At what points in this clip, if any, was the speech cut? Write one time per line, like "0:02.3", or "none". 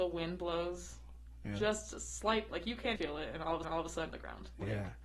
0:02.5
0:03.0
0:03.6
0:04.1